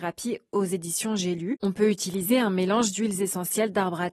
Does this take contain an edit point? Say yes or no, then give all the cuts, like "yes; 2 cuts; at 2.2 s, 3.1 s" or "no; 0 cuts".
no; 0 cuts